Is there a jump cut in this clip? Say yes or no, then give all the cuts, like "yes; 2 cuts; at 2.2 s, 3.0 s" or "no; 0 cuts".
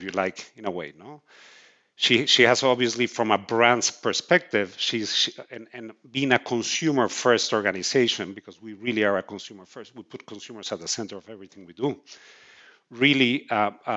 no; 0 cuts